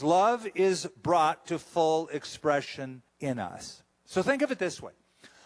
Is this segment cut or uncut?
cut